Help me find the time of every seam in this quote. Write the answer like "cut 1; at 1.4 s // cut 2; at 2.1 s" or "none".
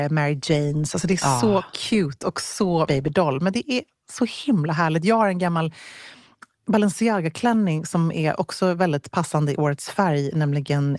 cut 1; at 2.9 s